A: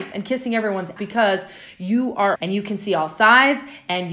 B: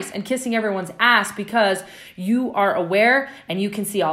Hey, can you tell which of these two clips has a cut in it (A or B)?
A